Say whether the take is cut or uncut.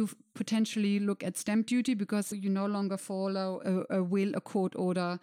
cut